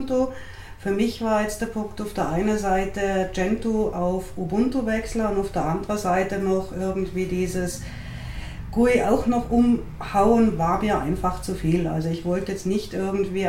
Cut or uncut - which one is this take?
uncut